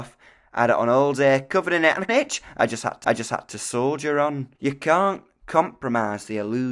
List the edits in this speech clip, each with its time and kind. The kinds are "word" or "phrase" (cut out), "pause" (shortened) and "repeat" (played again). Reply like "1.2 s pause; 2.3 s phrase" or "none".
2.1 s word; 3.0 s repeat; 4.5 s pause